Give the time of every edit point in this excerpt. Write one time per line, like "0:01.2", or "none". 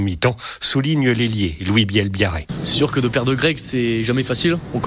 none